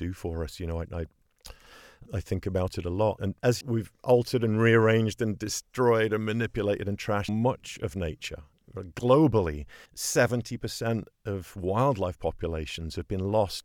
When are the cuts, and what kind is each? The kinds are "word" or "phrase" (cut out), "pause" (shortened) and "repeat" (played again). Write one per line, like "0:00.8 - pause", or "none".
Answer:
0:02.1 - word
0:03.2 - word
0:03.6 - word
0:07.3 - word
0:09.9 - pause

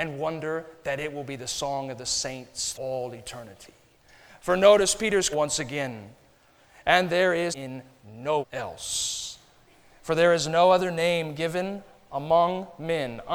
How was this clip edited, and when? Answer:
0:02.7 - word
0:05.3 - word
0:07.5 - word
0:08.4 - word

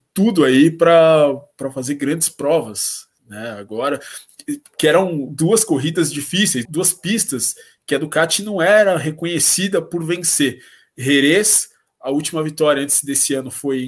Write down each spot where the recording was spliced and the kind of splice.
0:06.6 - word

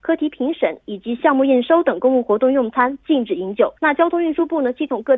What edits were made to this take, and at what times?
0:03.8 - pause

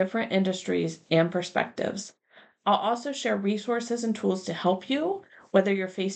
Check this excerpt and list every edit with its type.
none

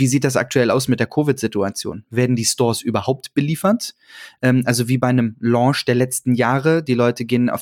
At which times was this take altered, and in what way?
none

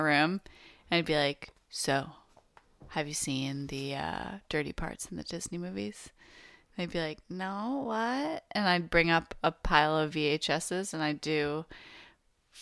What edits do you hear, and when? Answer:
none

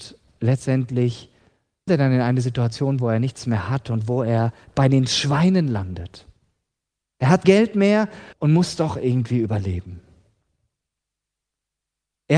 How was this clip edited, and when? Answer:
0:01.9 - word
0:07.4 - word
0:08.3 - pause

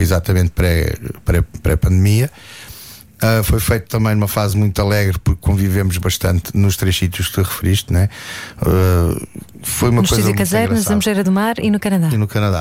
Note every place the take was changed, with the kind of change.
none

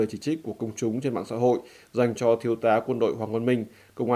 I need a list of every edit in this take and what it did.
none

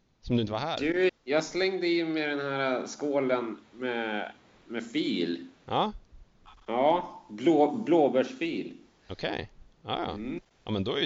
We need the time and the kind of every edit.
0:01.1 - word
0:05.5 - pause

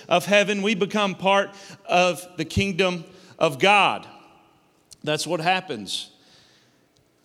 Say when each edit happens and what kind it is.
none

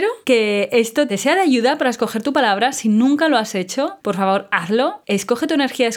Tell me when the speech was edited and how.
none

